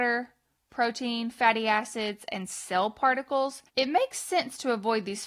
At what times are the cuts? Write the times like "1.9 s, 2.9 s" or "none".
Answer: 3.7 s